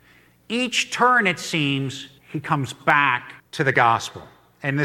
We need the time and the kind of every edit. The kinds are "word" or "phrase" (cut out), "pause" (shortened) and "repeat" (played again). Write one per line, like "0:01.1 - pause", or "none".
0:02.2 - pause
0:03.4 - pause